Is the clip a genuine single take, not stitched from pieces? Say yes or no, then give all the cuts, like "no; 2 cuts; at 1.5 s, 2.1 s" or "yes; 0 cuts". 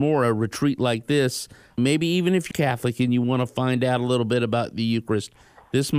no; 1 cut; at 2.5 s